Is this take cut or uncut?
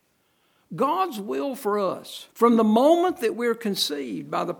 cut